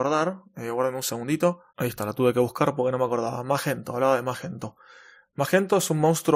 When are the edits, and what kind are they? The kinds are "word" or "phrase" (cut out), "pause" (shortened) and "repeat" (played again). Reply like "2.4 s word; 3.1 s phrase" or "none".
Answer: 1.7 s pause